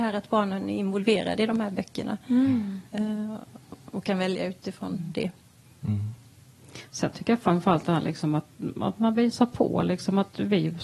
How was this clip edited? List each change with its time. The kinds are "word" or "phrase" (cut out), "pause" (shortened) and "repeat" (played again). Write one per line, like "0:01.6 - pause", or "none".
none